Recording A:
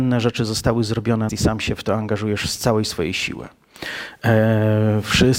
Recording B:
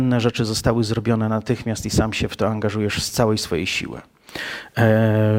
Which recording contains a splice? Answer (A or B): A